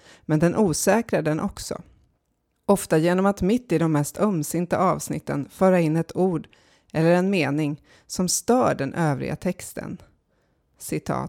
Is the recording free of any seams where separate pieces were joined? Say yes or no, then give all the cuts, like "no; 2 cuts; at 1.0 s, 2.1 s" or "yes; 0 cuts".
yes; 0 cuts